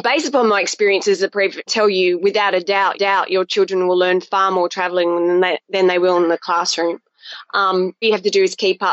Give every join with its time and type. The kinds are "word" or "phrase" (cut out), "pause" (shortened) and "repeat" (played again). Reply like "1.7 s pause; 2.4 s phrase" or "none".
1.7 s phrase; 2.9 s repeat; 8.0 s word

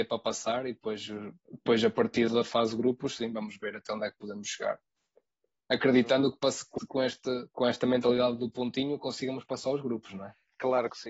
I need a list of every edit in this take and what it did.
1.4 s pause; 2.3 s word; 6.8 s word; 7.5 s pause

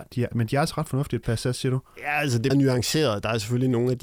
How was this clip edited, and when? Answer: 1.2 s word; 2.5 s word

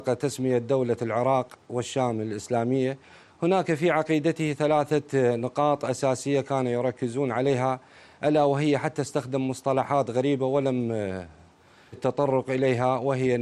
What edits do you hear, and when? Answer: 11.9 s word

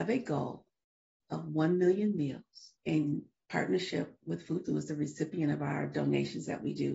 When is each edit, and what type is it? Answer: 2.8 s pause; 4.7 s word

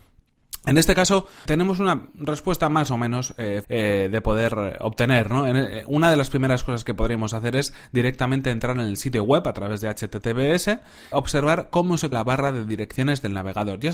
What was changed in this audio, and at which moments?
1.5 s word; 3.6 s phrase; 11.1 s word; 12.1 s word

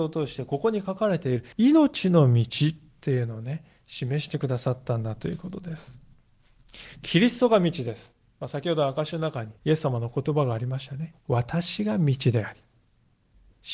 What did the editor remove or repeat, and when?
1.5 s pause; 9.6 s pause; 11.2 s pause

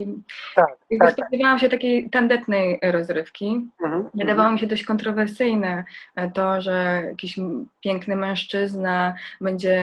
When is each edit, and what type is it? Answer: 3.7 s pause

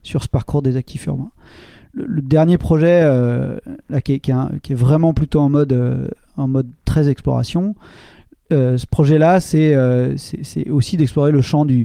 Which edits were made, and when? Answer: none

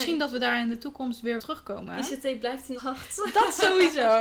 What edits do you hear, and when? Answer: 1.4 s phrase; 2.8 s word

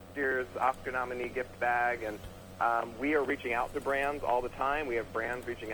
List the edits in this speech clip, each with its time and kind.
none

